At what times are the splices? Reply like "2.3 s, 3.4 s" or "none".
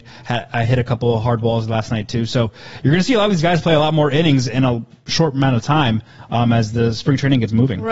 none